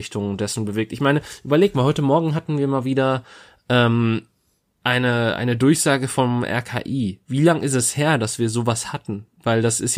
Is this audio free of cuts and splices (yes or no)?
yes